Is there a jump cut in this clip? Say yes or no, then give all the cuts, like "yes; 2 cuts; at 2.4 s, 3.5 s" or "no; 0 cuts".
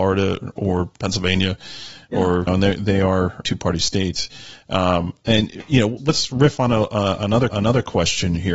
yes; 4 cuts; at 2.5 s, 3.4 s, 6.0 s, 7.5 s